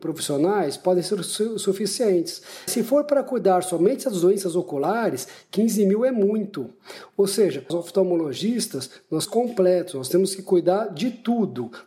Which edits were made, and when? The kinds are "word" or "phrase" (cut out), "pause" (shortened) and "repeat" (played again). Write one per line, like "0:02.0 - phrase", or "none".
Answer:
0:02.7 - word
0:07.7 - word
0:09.2 - word